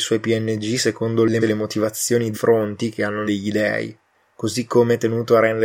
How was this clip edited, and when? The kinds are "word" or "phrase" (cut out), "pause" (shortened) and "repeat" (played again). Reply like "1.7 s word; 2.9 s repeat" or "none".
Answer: 1.4 s word; 2.3 s word; 3.3 s word